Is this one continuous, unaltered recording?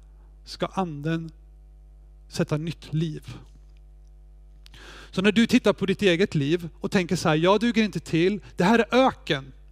yes; 0 cuts

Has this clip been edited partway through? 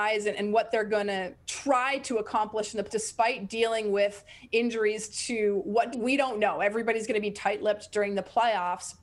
yes; 2 cuts; at 2.9 s, 5.9 s

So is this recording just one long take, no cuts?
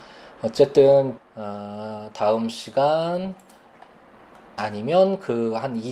no; 2 cuts; at 1.2 s, 4.6 s

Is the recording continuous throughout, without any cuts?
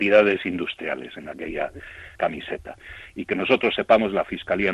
no; 1 cut; at 2.2 s

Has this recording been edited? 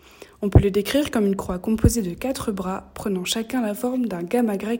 no; 0 cuts

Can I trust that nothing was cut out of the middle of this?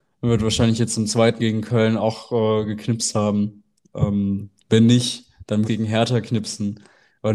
no; 2 cuts; at 1.4 s, 5.6 s

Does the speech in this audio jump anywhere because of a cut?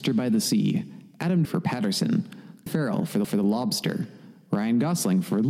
yes; 3 cuts; at 1.4 s, 2.7 s, 3.2 s

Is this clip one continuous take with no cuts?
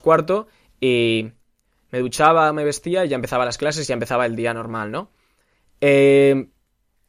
yes; 0 cuts

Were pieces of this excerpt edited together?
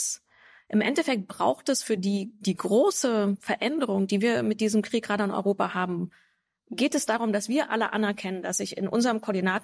no; 0 cuts

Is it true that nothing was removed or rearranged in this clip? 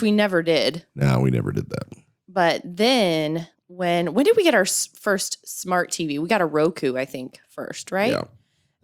no; 2 cuts; at 2.2 s, 3.5 s

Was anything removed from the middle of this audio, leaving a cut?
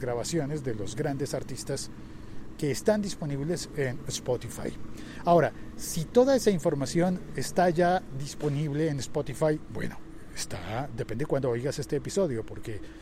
no; 0 cuts

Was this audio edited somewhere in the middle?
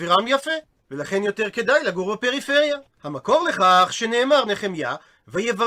yes; 1 cut; at 4.5 s

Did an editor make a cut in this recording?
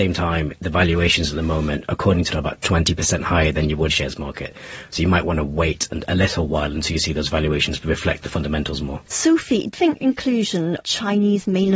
yes; 5 cuts; at 2.3 s, 3.9 s, 9.1 s, 9.7 s, 10.8 s

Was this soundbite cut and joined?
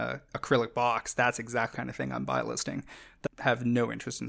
yes; 2 cuts; at 1.7 s, 3.3 s

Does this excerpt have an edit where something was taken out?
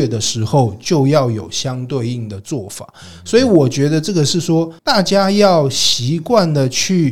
yes; 1 cut; at 4.8 s

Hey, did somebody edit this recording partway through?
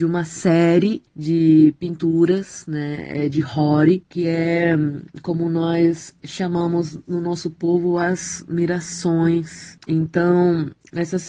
no; 0 cuts

